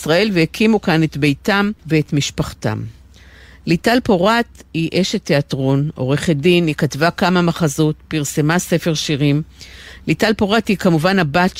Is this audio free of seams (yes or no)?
yes